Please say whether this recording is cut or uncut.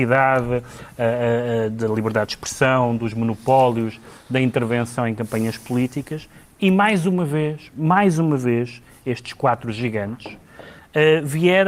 uncut